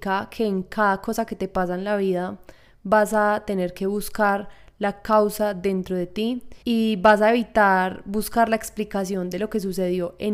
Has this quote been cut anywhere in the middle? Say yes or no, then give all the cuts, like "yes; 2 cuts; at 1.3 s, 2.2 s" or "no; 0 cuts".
yes; 1 cut; at 6.6 s